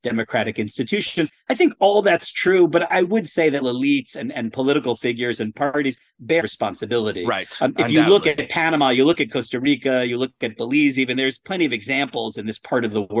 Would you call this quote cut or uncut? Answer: cut